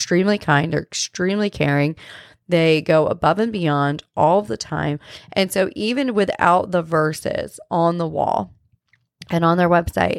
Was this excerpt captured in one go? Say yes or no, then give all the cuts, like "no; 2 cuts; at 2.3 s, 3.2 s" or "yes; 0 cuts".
yes; 0 cuts